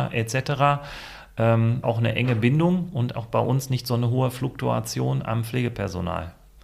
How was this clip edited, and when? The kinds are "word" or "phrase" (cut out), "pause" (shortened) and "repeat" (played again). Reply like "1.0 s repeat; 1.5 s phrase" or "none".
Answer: 1.8 s phrase; 3.1 s word